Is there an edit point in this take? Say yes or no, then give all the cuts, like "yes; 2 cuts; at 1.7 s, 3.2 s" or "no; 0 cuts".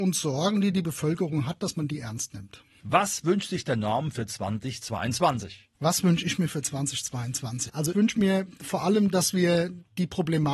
yes; 2 cuts; at 5.7 s, 7.9 s